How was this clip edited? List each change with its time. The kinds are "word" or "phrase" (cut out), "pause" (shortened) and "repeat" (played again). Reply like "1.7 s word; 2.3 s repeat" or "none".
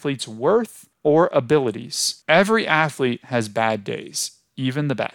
0.9 s pause; 2.2 s pause